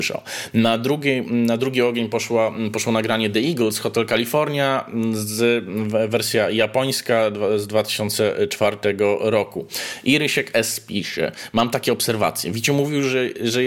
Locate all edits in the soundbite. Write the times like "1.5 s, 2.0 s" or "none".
none